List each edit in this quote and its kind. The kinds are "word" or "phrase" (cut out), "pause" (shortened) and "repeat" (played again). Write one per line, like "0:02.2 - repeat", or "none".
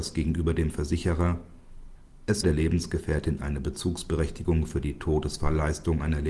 0:02.4 - word